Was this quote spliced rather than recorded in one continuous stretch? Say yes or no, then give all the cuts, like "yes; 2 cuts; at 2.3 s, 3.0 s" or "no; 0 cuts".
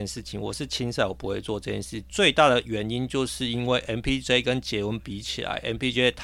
no; 0 cuts